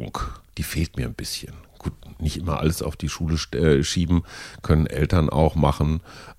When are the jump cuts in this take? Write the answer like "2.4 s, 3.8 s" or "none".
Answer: none